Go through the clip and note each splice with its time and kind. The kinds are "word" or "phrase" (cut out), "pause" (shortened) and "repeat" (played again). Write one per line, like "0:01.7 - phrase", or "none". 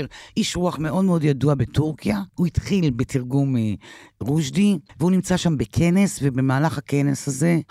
0:02.3 - pause
0:04.9 - pause